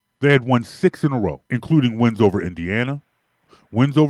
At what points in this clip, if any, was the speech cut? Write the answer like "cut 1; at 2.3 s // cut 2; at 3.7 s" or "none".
cut 1; at 1.5 s